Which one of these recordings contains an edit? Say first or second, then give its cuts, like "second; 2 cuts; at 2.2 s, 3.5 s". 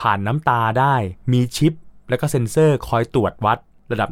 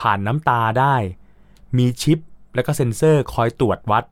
first; 1 cut; at 1.2 s